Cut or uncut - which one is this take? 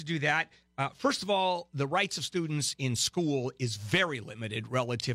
uncut